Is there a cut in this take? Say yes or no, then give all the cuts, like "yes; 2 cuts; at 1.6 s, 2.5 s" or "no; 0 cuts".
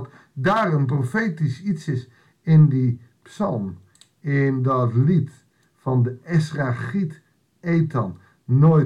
no; 0 cuts